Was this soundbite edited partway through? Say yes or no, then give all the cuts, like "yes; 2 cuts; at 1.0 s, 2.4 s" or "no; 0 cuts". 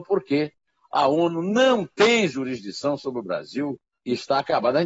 yes; 1 cut; at 3.8 s